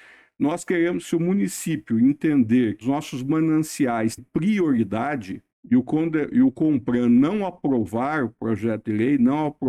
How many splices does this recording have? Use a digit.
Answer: 3